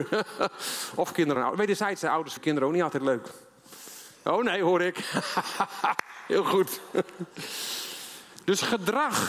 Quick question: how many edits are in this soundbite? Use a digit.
2